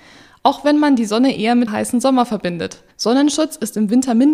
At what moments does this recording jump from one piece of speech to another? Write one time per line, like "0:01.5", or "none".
0:01.7
0:02.9